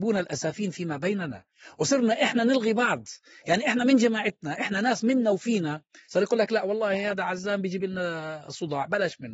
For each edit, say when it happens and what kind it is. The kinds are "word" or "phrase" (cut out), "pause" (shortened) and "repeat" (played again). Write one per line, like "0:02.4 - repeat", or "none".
none